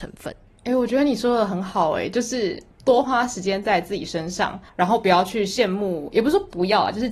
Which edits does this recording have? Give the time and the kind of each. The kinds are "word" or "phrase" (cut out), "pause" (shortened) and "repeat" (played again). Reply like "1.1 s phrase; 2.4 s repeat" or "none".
4.7 s pause